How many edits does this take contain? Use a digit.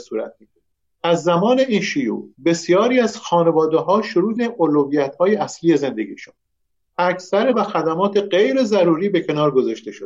3